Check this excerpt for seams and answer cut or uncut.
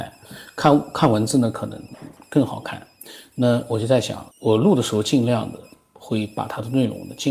cut